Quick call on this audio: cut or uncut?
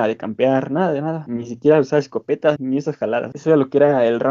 cut